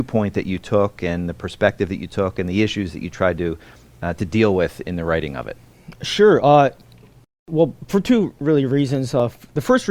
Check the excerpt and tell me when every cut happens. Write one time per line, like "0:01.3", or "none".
none

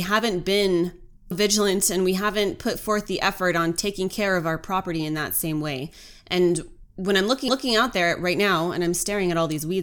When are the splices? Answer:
0:01.3
0:06.9
0:07.5

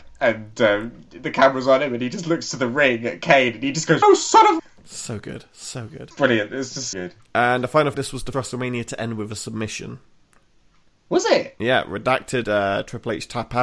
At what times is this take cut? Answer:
0:04.0
0:04.6
0:06.1
0:06.9
0:07.9
0:08.3
0:12.4

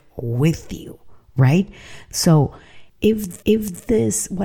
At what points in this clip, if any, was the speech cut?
0:03.4

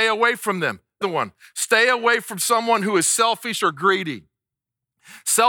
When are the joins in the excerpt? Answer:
0:01.0

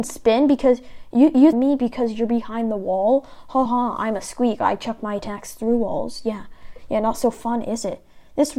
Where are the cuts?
0:01.5
0:03.7

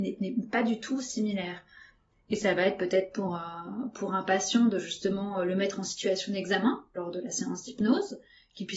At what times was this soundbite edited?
none

